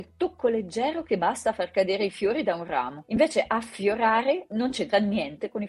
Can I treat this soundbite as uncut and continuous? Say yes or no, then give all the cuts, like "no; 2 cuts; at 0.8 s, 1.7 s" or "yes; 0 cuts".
yes; 0 cuts